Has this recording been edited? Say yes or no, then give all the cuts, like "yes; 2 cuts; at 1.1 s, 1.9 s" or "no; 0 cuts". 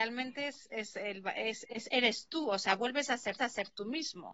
yes; 1 cut; at 3.4 s